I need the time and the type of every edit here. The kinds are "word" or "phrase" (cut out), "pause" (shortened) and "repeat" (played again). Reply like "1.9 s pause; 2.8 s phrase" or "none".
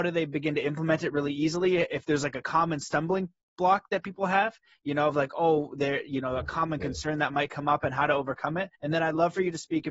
8.7 s pause